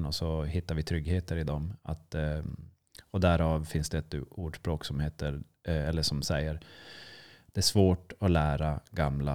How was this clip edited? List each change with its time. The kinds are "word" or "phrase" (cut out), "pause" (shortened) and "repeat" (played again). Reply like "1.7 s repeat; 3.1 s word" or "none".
none